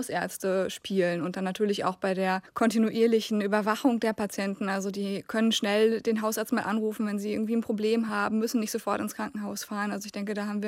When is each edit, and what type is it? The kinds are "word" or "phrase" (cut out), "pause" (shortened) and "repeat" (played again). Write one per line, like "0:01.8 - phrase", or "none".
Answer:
none